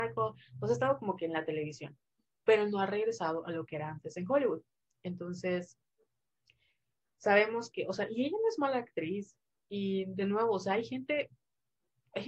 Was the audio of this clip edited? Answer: no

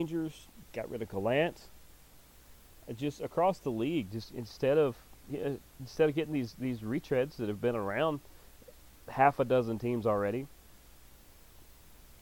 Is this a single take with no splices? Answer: yes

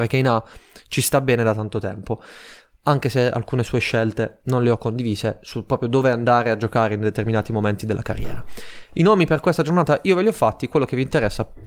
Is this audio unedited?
yes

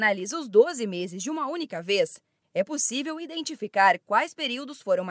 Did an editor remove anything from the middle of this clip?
no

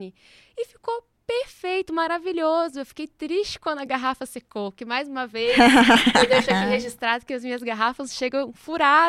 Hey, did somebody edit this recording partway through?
no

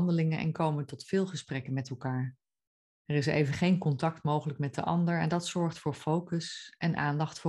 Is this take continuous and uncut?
no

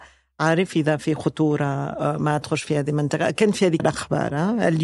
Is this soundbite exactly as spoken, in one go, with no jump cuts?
no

